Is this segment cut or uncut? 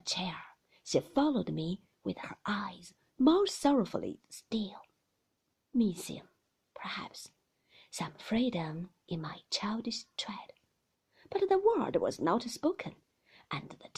uncut